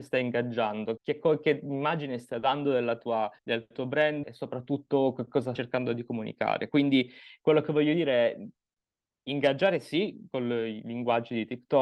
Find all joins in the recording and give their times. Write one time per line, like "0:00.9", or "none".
0:01.0
0:03.4
0:04.2
0:05.6